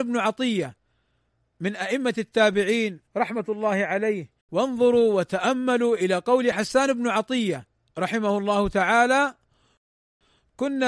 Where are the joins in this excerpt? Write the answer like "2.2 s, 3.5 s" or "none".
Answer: 3.1 s, 4.4 s